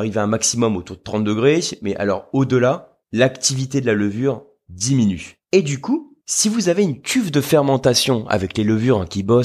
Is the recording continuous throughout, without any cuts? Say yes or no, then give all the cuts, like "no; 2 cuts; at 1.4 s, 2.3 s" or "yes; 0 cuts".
no; 3 cuts; at 3.0 s, 5.4 s, 6.2 s